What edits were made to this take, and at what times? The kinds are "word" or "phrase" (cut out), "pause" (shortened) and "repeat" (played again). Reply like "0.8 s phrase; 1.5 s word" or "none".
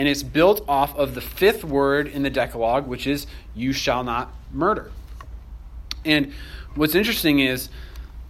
none